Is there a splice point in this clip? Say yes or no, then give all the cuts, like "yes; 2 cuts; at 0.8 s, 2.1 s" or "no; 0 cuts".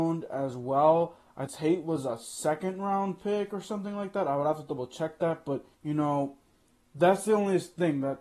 yes; 2 cuts; at 1.5 s, 5.7 s